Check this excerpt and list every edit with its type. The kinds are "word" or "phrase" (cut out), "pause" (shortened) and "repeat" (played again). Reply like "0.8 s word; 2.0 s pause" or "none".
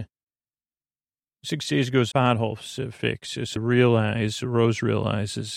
2.1 s phrase; 3.6 s word